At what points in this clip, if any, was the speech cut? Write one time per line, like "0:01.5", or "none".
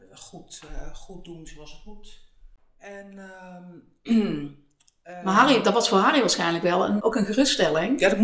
0:07.0